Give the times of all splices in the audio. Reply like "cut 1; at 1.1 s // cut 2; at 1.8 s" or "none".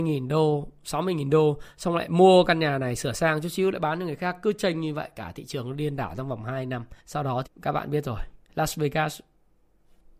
cut 1; at 7.0 s // cut 2; at 7.4 s // cut 3; at 8.4 s